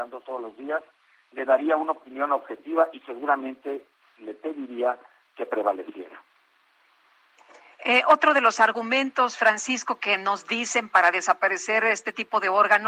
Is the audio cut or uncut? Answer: uncut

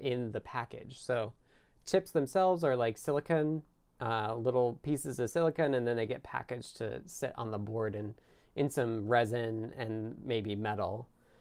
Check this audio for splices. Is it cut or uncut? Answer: uncut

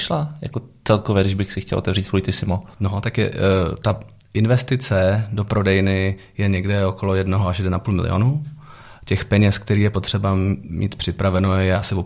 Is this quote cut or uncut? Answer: uncut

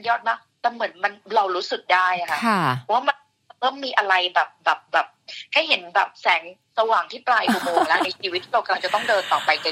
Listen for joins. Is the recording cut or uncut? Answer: uncut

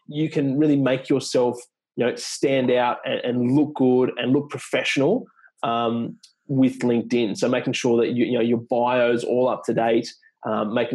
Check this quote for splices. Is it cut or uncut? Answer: uncut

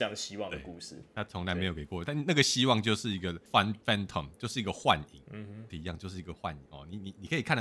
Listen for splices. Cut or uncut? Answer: cut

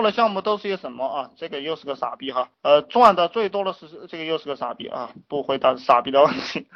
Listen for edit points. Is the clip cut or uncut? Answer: cut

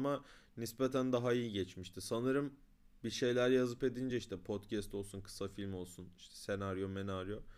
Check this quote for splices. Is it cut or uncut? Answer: uncut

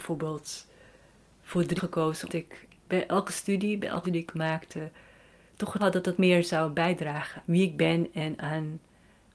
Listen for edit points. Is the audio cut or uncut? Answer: cut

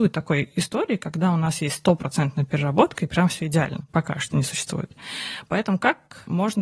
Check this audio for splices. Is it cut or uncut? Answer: uncut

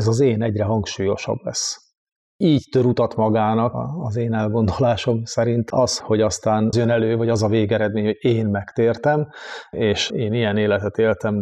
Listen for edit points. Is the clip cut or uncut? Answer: cut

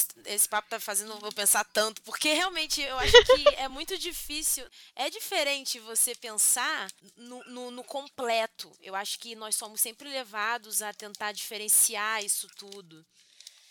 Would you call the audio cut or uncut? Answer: uncut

